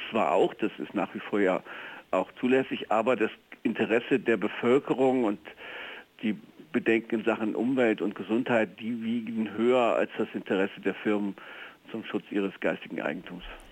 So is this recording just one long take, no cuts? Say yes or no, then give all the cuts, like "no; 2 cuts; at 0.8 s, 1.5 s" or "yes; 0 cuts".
yes; 0 cuts